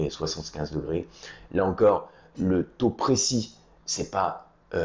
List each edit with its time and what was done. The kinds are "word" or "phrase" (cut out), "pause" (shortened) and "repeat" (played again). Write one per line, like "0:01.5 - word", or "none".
none